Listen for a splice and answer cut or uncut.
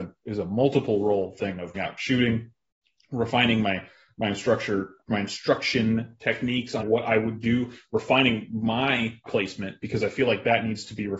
cut